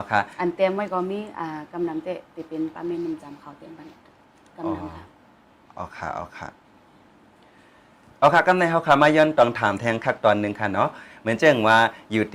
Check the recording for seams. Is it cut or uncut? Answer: uncut